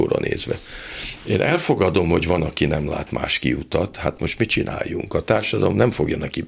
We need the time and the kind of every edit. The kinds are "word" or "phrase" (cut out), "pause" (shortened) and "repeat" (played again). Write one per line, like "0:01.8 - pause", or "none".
none